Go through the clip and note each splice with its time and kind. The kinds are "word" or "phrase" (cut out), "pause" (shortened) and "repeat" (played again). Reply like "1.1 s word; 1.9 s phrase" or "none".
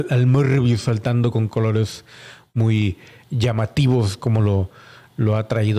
none